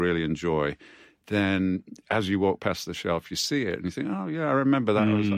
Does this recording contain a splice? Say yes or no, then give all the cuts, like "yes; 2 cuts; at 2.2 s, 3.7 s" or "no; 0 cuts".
no; 0 cuts